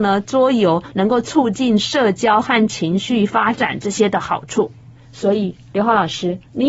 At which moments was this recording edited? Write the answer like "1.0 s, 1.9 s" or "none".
none